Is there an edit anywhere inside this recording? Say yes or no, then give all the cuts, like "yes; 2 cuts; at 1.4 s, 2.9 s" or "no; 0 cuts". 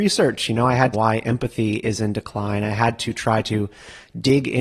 yes; 1 cut; at 0.9 s